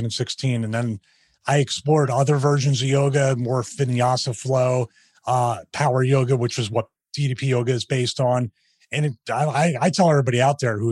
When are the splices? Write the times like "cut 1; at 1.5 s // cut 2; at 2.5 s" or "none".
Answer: none